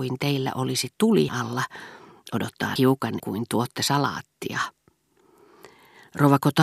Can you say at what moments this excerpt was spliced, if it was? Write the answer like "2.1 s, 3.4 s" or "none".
1.3 s, 2.8 s, 3.2 s